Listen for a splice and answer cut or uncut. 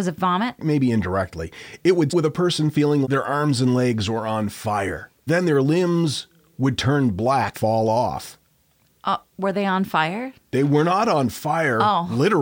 cut